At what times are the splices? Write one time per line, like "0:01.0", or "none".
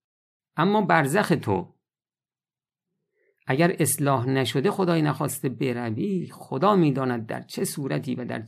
none